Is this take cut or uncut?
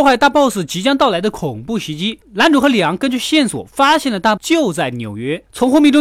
cut